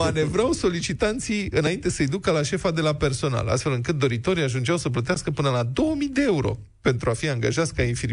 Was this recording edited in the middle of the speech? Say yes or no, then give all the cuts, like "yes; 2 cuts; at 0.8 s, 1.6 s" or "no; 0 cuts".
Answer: no; 0 cuts